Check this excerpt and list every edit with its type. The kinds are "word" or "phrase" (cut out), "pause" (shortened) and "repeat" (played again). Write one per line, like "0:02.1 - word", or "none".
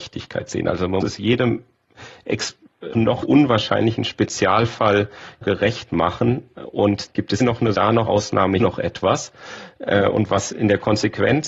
0:01.0 - word
0:02.9 - word
0:03.2 - word
0:05.4 - word
0:07.1 - word
0:07.4 - word
0:07.7 - word
0:08.1 - word
0:08.6 - word